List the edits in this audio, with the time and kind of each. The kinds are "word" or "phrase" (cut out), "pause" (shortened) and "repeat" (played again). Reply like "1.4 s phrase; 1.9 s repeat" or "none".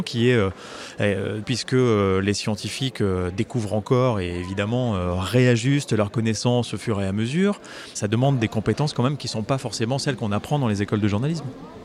1.4 s word; 8.0 s word